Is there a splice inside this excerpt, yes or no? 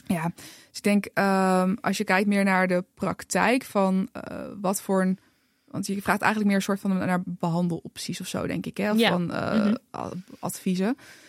no